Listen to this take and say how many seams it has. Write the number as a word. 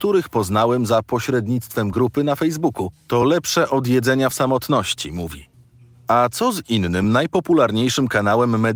zero